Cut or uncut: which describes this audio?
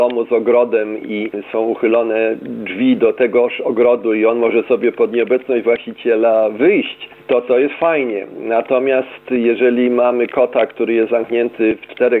uncut